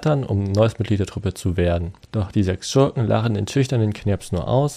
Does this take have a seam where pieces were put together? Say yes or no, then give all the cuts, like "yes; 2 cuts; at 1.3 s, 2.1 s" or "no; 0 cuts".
yes; 1 cut; at 2.0 s